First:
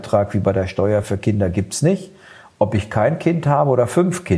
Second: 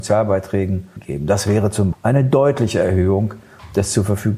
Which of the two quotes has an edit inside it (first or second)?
second